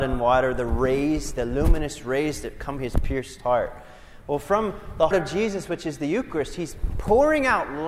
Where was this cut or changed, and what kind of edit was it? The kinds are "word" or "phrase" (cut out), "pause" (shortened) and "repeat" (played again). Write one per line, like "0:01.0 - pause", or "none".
0:02.8 - word
0:05.1 - word